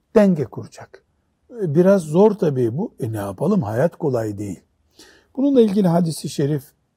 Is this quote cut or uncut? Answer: uncut